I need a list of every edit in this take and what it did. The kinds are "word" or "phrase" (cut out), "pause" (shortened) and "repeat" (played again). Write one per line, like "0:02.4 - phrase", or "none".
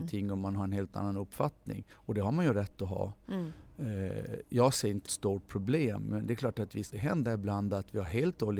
0:01.9 - pause
0:05.1 - phrase
0:06.9 - word